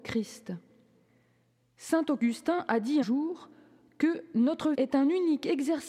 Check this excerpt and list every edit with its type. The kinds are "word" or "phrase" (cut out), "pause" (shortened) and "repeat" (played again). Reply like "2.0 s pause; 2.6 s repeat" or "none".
3.0 s word; 4.7 s word